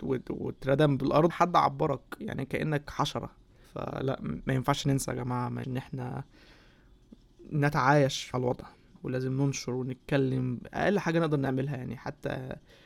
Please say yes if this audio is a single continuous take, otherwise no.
no